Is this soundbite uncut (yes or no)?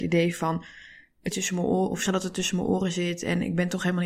no